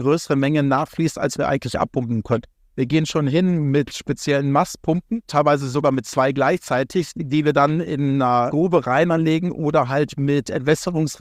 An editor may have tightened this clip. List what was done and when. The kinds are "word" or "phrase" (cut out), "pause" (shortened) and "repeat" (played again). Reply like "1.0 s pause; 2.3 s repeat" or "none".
none